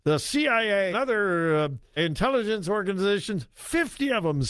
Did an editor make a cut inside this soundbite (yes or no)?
yes